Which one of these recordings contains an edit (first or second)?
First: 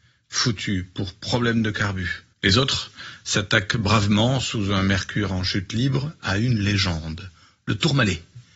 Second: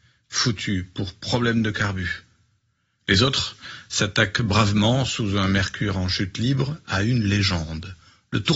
first